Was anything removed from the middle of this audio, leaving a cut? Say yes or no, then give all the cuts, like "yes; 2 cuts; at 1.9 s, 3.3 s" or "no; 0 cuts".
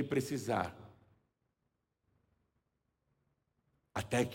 no; 0 cuts